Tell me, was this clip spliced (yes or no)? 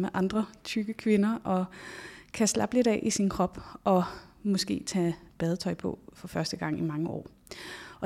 no